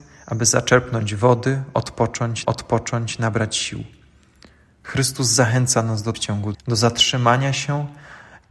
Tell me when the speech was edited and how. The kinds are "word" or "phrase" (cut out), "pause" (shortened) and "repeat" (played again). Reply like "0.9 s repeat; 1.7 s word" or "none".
2.4 s repeat; 6.1 s phrase; 6.5 s word